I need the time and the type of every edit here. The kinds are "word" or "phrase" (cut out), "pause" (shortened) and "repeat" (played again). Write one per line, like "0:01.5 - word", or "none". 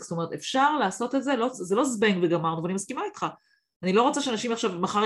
none